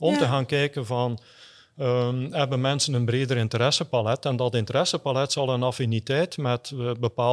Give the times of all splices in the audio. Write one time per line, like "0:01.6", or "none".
none